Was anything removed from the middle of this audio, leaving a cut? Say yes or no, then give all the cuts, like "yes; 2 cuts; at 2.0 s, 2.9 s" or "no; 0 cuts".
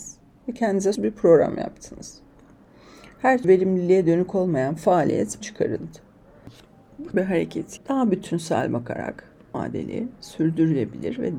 yes; 6 cuts; at 1.0 s, 3.4 s, 5.4 s, 7.1 s, 7.8 s, 9.5 s